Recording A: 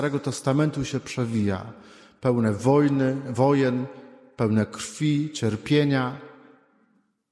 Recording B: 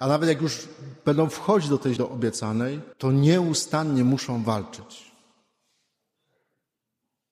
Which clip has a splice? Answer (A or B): B